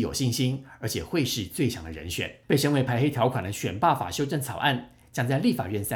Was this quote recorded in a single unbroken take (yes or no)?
no